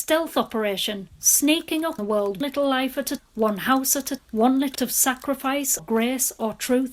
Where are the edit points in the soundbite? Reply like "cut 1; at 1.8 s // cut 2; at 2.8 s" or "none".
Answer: cut 1; at 2.0 s // cut 2; at 2.4 s // cut 3; at 3.2 s // cut 4; at 4.2 s // cut 5; at 4.7 s // cut 6; at 5.8 s